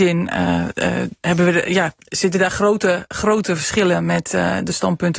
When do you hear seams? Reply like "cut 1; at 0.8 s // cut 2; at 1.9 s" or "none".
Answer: cut 1; at 1.2 s